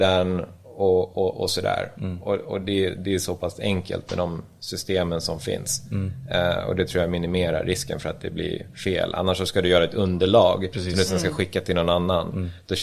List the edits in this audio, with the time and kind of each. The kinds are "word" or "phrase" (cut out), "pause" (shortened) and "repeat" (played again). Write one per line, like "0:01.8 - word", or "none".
none